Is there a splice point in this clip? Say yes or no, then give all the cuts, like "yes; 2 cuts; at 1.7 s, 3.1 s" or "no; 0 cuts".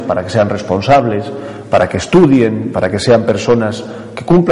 no; 0 cuts